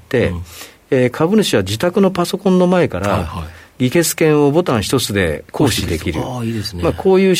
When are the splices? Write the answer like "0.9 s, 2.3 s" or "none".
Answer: 5.5 s